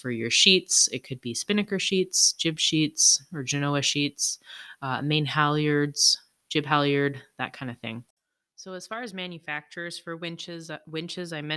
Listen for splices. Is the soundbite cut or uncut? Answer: uncut